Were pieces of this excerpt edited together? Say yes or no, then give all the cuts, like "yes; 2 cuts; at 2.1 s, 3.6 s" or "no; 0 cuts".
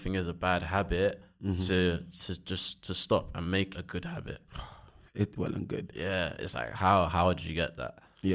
yes; 2 cuts; at 3.7 s, 5.4 s